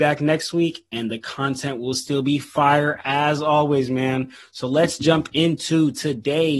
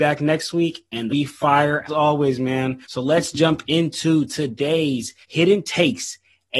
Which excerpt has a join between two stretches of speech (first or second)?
second